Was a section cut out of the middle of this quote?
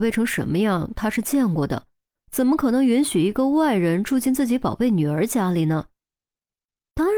no; 0 cuts

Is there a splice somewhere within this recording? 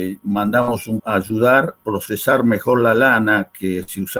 yes; 2 cuts; at 1.0 s, 1.8 s

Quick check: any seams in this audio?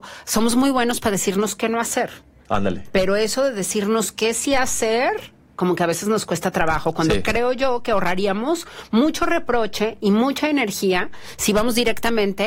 no; 0 cuts

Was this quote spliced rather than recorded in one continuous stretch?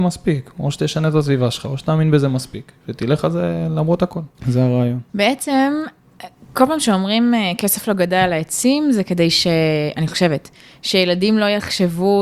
yes; 2 cuts; at 4.3 s, 5.1 s

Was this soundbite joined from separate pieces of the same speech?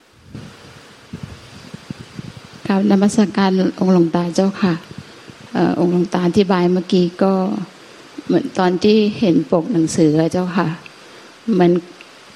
no; 0 cuts

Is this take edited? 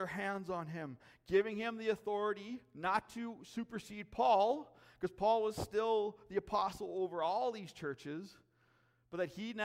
no; 0 cuts

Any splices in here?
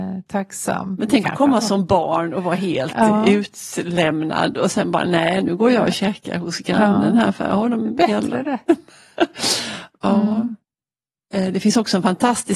no; 0 cuts

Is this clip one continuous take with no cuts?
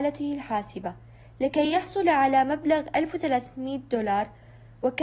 yes; 0 cuts

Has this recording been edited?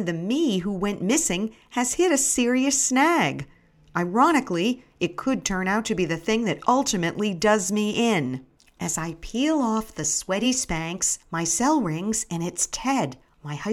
no; 0 cuts

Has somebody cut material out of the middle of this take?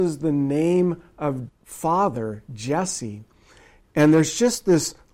yes; 1 cut; at 1.5 s

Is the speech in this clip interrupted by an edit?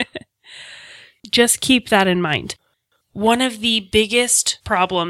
no; 0 cuts

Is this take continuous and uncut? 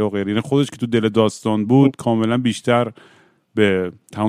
yes; 0 cuts

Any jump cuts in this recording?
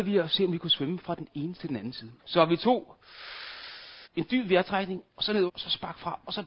yes; 5 cuts; at 1.5 s, 2.2 s, 4.0 s, 5.1 s, 5.5 s

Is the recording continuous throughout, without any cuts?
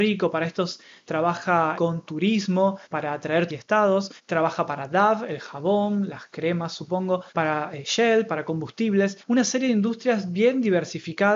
no; 6 cuts; at 1.8 s, 2.8 s, 3.5 s, 4.2 s, 7.3 s, 9.2 s

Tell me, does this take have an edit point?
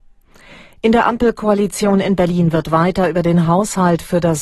no; 0 cuts

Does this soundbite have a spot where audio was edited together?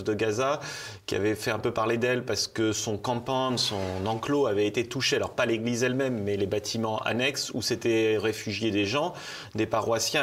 no; 0 cuts

